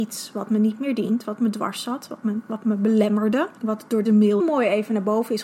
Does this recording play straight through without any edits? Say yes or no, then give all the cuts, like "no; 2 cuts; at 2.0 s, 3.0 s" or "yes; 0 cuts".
no; 3 cuts; at 3.6 s, 4.0 s, 4.4 s